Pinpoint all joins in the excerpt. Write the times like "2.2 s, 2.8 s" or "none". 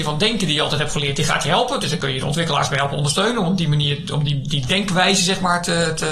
none